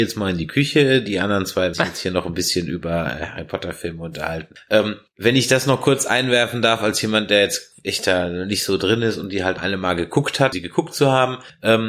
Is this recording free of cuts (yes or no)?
no